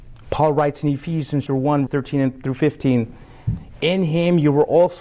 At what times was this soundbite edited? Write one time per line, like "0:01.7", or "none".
0:01.5
0:01.9